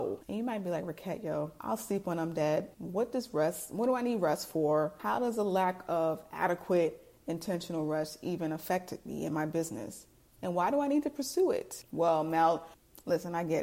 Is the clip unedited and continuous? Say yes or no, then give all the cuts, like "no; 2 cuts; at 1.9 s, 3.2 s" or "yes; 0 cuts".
yes; 0 cuts